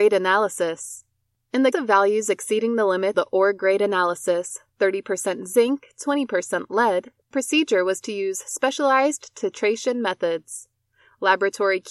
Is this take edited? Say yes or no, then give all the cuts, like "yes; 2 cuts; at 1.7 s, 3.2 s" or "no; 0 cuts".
yes; 3 cuts; at 1.7 s, 3.1 s, 7.3 s